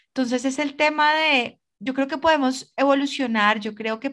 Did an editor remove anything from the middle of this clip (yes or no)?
no